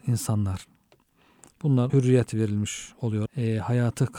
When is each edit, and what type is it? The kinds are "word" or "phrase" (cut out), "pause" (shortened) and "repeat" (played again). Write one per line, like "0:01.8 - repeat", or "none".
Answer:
0:01.9 - word
0:03.3 - word